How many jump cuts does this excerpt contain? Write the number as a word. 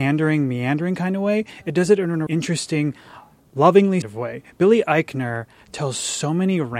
two